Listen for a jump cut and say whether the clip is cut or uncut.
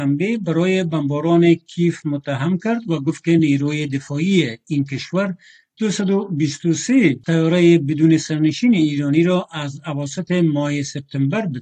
uncut